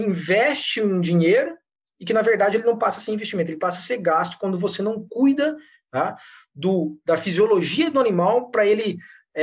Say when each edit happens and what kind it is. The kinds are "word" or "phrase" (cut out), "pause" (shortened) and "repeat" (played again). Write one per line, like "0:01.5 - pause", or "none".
none

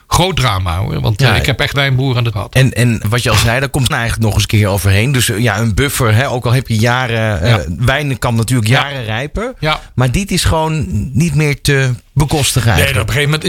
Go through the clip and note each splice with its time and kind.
0:01.7 - word
0:02.3 - word
0:03.0 - word
0:03.9 - word

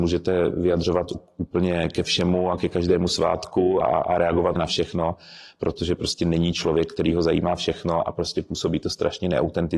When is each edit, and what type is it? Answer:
0:03.8 - word
0:04.6 - word

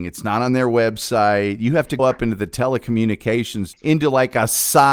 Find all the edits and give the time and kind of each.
0:02.0 - word
0:03.7 - word

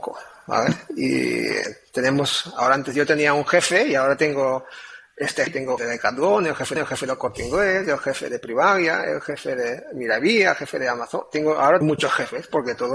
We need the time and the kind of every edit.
0:05.5 - word
0:05.8 - word
0:06.8 - repeat
0:11.8 - word

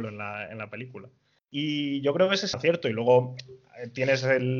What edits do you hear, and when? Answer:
0:01.4 - pause
0:02.5 - phrase

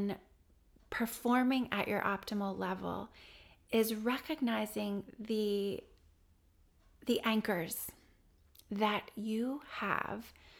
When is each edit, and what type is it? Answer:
none

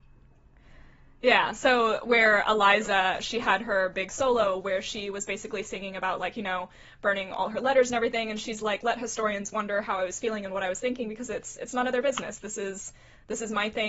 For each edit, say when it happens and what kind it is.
none

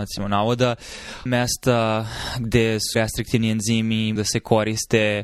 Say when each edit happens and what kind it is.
0:01.3 - word
0:02.9 - word
0:04.2 - word

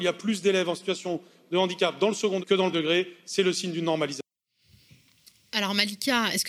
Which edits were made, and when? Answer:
0:02.4 - word
0:02.7 - word

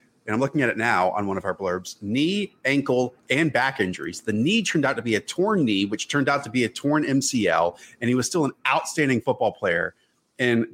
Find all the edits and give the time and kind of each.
none

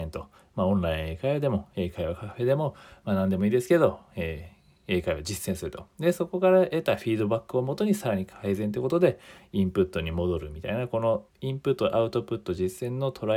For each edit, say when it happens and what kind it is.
0:11.3 - pause

